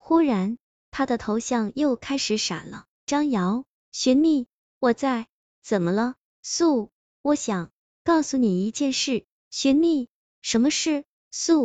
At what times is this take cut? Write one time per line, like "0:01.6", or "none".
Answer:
none